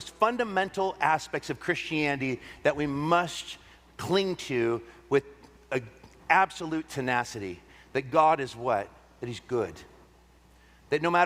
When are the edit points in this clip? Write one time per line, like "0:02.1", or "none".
none